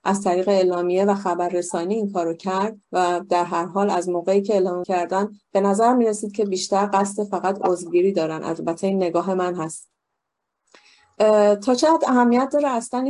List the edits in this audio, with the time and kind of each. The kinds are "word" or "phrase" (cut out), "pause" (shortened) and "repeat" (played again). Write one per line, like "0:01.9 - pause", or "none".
0:02.8 - pause
0:04.8 - word